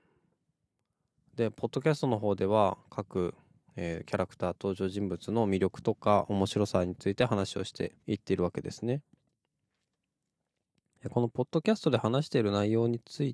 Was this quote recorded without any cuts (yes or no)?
no